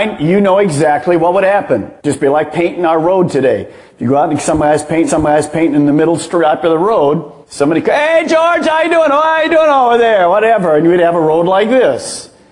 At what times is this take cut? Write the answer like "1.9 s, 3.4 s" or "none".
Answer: 2.0 s, 5.1 s, 7.4 s